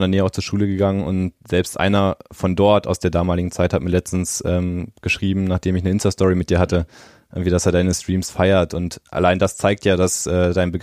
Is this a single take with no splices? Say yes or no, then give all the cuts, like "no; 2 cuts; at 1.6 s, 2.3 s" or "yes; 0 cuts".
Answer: yes; 0 cuts